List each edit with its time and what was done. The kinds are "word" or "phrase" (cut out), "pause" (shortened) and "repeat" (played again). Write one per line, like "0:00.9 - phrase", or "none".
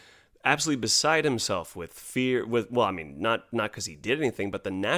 none